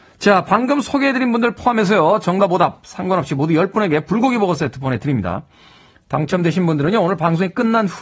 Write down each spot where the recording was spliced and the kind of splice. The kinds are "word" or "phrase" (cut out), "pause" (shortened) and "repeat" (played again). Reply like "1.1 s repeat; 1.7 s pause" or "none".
none